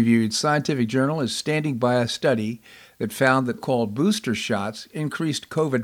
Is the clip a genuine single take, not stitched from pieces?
no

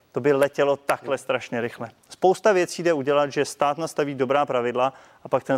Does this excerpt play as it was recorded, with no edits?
yes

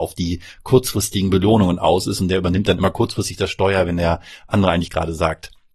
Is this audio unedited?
yes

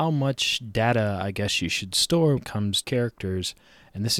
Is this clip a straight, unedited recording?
no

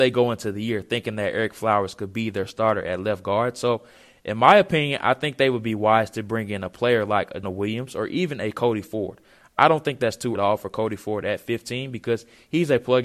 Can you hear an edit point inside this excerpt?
yes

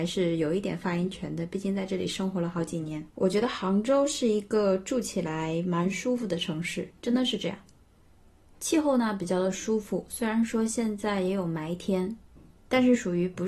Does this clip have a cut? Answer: yes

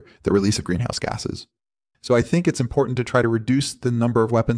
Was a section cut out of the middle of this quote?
no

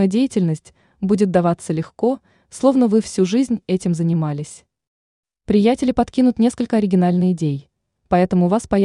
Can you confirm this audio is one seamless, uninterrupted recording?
yes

